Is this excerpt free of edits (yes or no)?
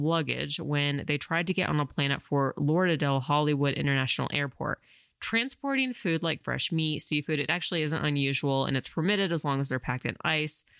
no